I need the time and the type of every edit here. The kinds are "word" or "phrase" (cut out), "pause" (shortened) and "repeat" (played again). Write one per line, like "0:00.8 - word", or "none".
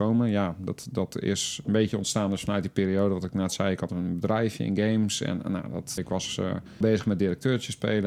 0:06.0 - word
0:06.8 - phrase